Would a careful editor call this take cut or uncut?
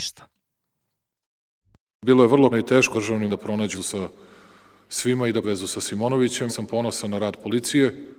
cut